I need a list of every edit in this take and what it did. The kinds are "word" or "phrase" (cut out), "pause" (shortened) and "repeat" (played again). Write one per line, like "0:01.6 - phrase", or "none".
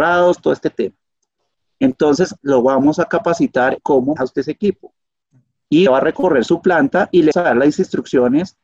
0:02.4 - word
0:03.8 - word
0:04.2 - word
0:05.9 - word
0:07.3 - word